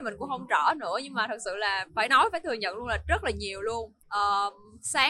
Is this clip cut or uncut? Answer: cut